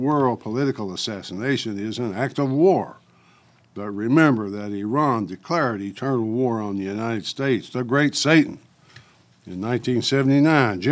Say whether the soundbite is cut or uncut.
uncut